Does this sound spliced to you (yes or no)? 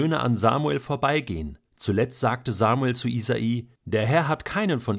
yes